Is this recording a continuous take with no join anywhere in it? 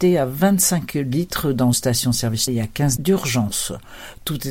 no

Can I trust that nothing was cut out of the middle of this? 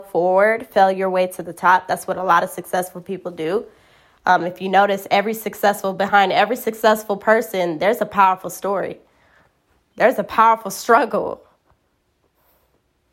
yes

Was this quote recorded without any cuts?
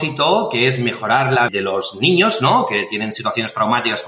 no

